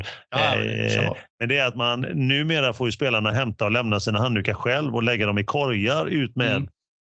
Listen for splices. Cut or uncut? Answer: uncut